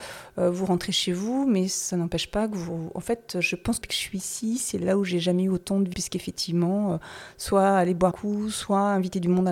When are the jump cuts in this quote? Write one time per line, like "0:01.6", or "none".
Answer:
0:03.8
0:05.9
0:08.1